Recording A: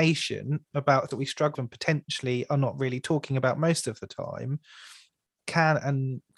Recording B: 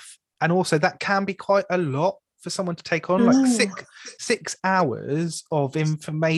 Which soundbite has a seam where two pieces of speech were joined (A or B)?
A